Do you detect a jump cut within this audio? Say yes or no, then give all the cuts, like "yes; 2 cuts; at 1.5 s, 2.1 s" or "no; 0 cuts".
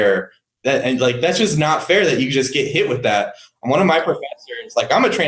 no; 0 cuts